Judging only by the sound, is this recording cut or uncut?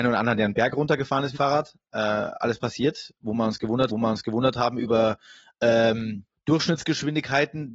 cut